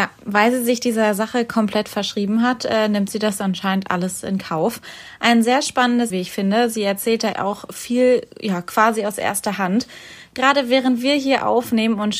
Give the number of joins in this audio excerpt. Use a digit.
2